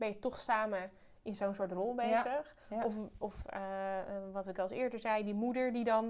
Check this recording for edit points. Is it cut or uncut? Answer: uncut